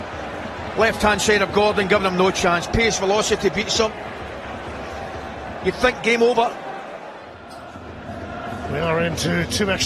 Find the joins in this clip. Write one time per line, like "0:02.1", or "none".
none